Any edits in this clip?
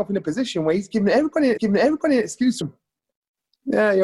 yes; 2 cuts; at 1.6 s, 2.6 s

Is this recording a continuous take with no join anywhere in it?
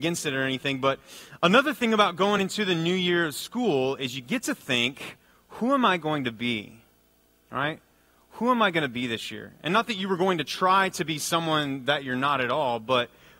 yes; 0 cuts

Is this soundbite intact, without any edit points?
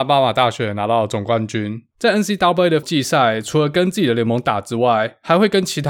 no; 1 cut; at 2.8 s

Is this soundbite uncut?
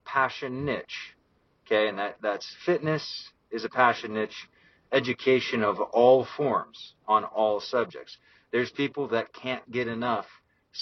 yes; 0 cuts

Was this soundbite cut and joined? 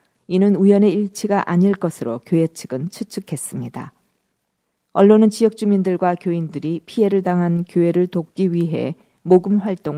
no; 0 cuts

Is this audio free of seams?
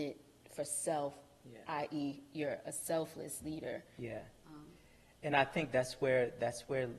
yes; 0 cuts

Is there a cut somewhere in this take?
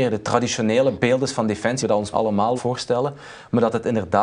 yes; 3 cuts; at 1.8 s, 2.1 s, 2.6 s

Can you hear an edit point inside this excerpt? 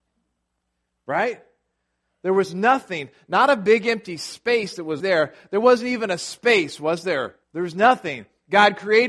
yes; 2 cuts; at 5.0 s, 7.4 s

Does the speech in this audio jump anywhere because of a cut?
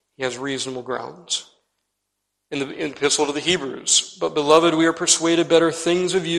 no; 0 cuts

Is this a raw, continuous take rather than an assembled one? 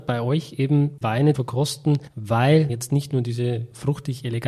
no; 3 cuts; at 1.0 s, 1.3 s, 2.7 s

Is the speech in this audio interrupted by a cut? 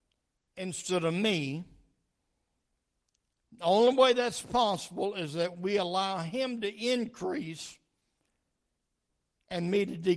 no; 0 cuts

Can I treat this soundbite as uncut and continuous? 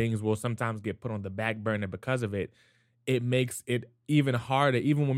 yes; 0 cuts

